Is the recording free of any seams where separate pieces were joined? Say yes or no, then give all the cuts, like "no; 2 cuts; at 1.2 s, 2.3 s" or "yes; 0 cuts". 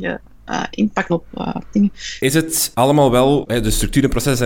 no; 3 cuts; at 1.1 s, 2.7 s, 3.5 s